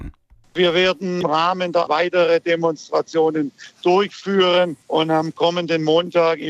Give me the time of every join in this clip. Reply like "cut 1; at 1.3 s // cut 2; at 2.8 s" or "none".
cut 1; at 1.2 s // cut 2; at 1.9 s // cut 3; at 4.8 s